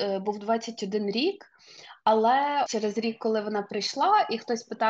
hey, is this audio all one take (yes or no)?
no